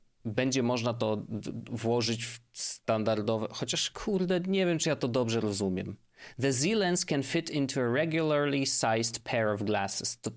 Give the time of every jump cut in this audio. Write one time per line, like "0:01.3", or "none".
none